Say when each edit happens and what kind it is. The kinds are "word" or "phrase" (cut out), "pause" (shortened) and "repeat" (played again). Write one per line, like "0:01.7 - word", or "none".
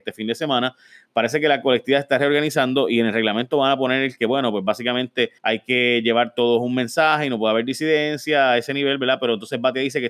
0:05.4 - pause